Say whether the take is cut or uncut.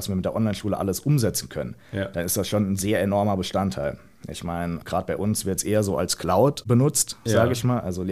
uncut